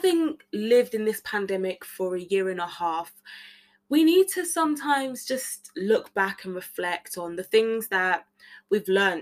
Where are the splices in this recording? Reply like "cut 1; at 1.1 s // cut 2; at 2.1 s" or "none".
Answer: none